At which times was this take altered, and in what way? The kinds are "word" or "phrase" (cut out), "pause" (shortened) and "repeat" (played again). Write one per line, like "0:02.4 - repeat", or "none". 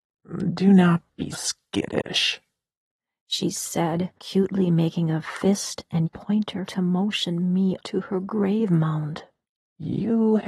0:01.3 - word
0:04.2 - pause
0:06.0 - phrase
0:06.7 - word
0:07.8 - word
0:09.4 - pause